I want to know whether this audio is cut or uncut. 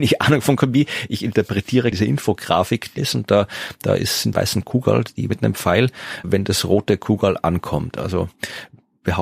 cut